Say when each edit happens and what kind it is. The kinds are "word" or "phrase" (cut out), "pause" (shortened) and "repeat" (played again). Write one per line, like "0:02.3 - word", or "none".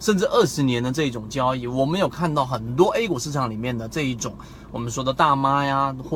none